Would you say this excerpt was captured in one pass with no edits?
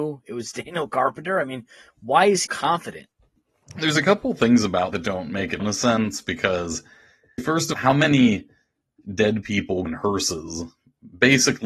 no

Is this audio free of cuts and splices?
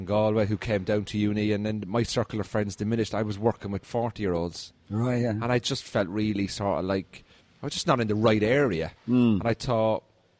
no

